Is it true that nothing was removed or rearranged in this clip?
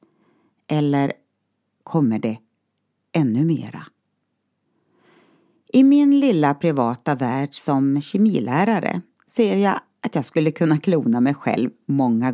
yes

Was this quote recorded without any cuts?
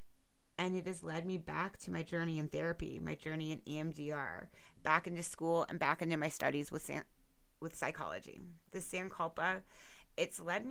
yes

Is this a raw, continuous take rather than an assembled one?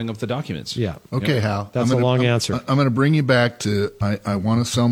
no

